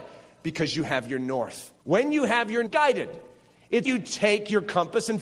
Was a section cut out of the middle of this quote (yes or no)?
yes